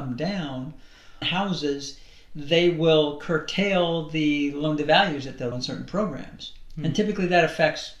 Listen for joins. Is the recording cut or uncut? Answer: cut